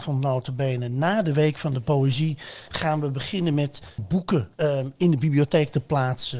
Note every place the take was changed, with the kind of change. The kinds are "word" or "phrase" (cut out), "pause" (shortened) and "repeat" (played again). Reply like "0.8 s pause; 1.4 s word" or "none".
4.0 s word; 4.5 s pause